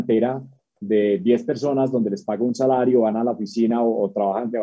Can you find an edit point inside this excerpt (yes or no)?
no